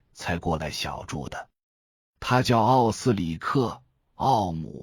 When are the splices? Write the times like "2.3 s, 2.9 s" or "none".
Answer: none